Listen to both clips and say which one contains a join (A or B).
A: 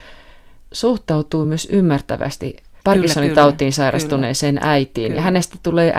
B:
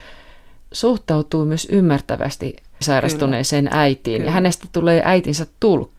B